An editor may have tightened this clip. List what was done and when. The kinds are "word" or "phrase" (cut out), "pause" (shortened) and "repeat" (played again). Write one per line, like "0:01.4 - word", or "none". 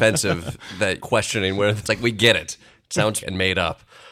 0:01.0 - word
0:01.8 - word
0:03.2 - word